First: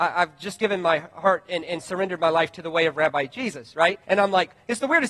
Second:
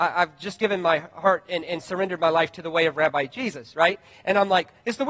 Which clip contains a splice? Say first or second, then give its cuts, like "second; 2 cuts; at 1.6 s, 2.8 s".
first; 1 cut; at 4.0 s